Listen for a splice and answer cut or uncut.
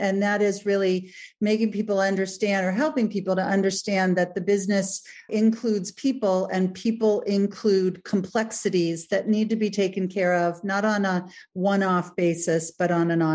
uncut